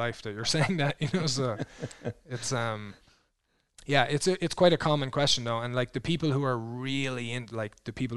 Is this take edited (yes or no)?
no